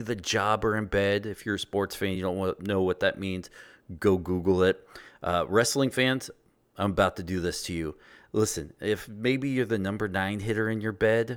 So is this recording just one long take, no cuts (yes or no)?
yes